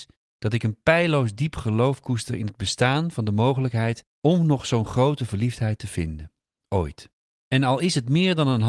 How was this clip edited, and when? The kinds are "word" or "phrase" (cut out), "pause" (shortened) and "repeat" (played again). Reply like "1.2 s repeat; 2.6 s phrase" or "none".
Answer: 7.2 s pause